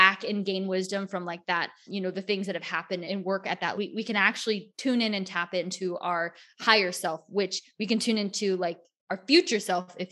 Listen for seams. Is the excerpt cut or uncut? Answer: cut